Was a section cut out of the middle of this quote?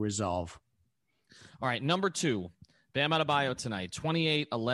no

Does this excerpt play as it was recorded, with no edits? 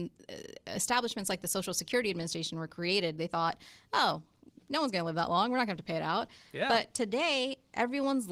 yes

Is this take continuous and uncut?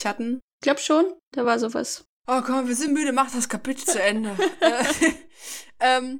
yes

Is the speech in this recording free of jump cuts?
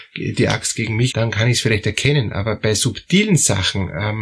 no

